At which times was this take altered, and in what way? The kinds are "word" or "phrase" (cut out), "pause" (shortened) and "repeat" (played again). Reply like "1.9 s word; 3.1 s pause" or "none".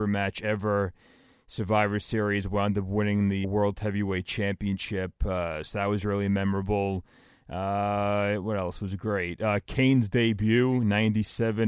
3.4 s word